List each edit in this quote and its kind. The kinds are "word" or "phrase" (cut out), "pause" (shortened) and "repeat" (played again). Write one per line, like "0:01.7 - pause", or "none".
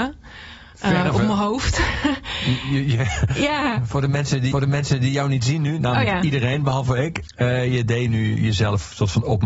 0:04.5 - repeat